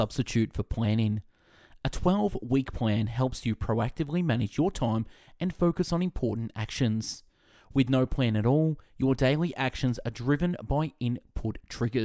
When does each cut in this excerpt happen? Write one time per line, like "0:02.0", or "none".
none